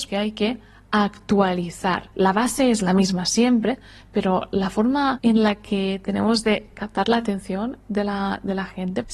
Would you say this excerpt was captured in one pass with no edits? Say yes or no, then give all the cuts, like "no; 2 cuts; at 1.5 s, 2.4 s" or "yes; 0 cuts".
yes; 0 cuts